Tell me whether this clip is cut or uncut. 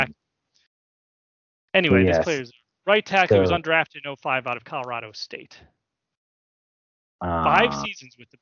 uncut